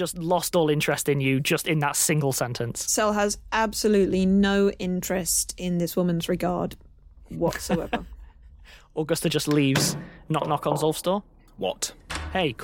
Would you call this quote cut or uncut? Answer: uncut